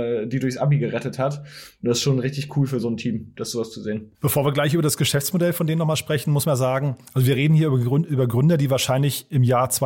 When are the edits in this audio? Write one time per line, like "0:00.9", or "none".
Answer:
0:04.1
0:06.4